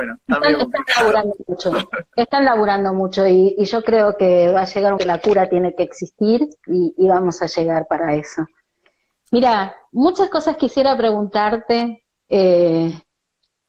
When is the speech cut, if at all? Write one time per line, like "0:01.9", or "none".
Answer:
0:05.0
0:06.6